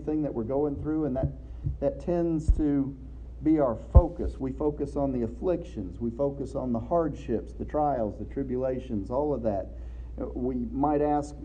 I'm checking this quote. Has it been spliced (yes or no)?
no